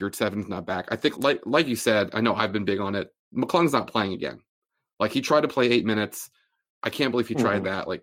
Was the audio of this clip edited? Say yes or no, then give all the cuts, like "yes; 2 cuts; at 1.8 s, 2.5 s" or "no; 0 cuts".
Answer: yes; 1 cut; at 1.1 s